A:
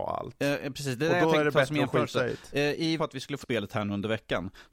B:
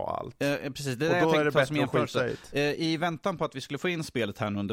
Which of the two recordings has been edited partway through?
A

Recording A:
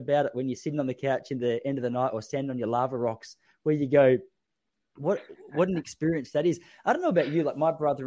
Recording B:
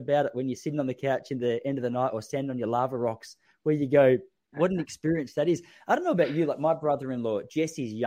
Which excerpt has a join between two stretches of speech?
B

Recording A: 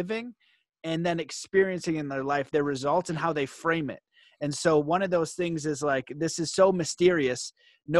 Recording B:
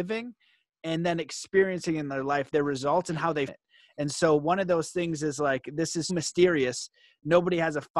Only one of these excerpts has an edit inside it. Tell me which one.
B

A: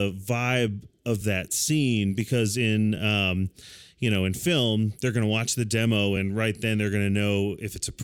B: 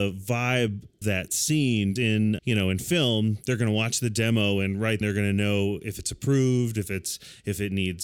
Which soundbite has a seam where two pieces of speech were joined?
B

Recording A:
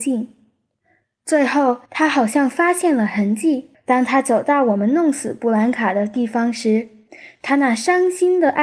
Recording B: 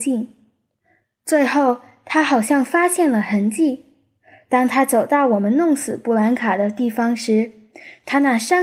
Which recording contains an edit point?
A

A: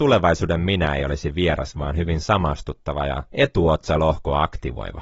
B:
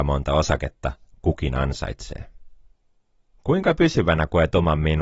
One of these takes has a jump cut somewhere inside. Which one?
A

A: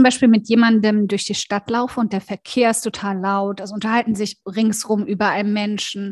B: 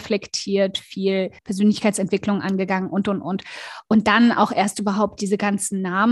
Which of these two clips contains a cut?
B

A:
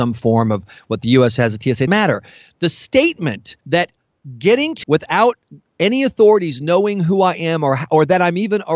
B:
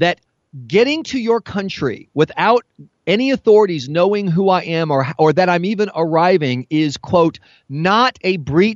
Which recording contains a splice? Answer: A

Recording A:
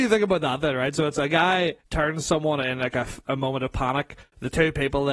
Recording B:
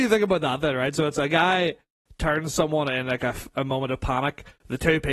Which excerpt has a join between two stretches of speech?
A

